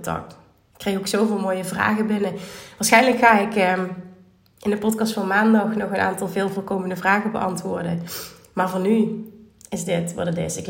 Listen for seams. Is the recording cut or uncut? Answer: uncut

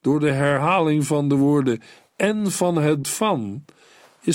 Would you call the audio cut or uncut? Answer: cut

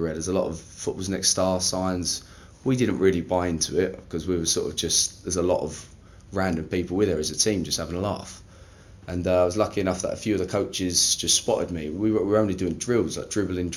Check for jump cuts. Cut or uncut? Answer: uncut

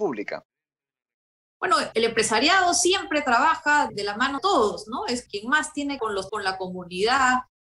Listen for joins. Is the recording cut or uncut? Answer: cut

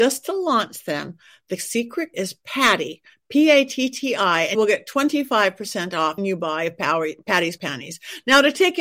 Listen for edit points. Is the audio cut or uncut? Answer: cut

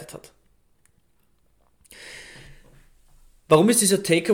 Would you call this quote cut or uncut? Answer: uncut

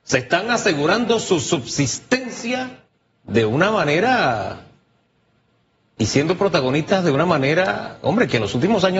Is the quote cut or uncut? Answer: uncut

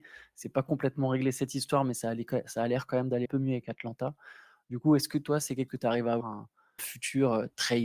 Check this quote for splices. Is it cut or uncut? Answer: cut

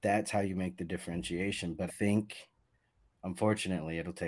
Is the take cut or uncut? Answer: cut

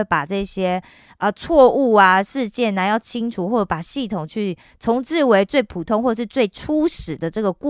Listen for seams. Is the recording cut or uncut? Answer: uncut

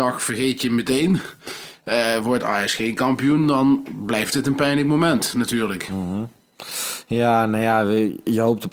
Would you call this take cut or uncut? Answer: uncut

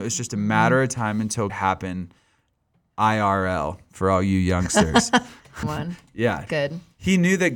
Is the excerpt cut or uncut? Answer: cut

